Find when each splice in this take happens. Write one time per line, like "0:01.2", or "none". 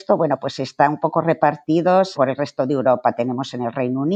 0:02.1

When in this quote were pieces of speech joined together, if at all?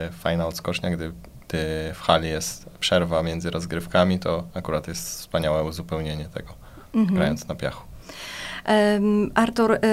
none

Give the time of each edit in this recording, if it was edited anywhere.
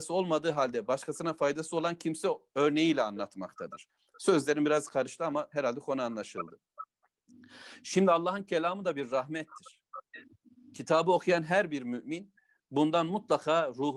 none

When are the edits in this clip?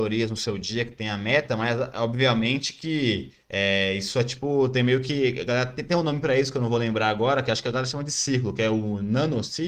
0:03.4

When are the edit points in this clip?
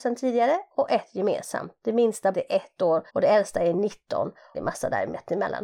0:02.3
0:03.1
0:04.5

